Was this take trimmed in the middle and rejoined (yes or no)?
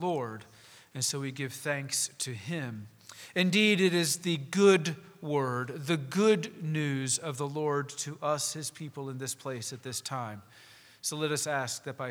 no